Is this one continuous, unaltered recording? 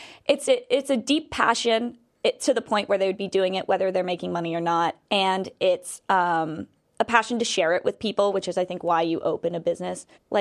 yes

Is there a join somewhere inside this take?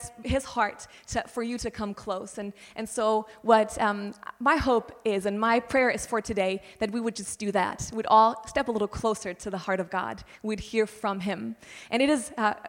no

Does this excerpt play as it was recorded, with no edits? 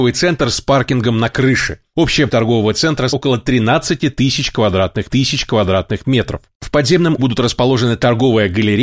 no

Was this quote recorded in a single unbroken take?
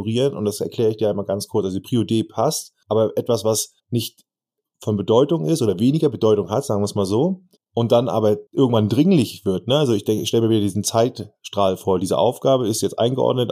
no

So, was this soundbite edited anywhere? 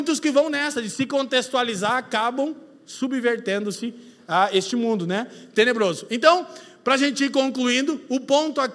no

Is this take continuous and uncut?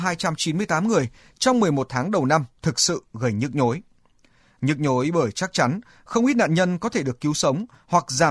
yes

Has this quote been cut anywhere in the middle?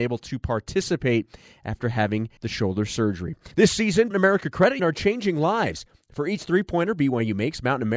yes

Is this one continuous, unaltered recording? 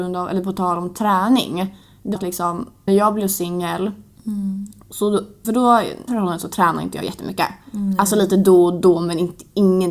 no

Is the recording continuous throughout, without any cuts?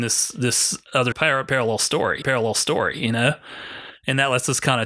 no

